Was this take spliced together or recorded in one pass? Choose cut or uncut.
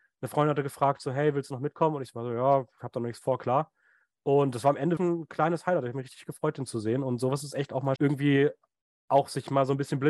cut